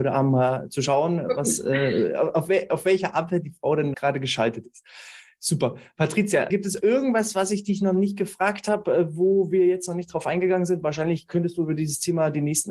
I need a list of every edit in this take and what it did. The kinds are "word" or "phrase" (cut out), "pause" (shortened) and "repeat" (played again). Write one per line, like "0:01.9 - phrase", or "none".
0:03.9 - word
0:06.5 - word